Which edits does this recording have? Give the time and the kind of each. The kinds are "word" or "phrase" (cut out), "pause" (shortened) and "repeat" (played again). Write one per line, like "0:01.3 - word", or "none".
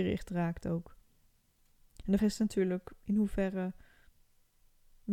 0:02.2 - word